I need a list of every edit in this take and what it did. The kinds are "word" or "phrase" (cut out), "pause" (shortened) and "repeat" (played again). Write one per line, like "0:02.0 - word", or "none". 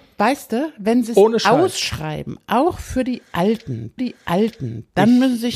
0:04.0 - repeat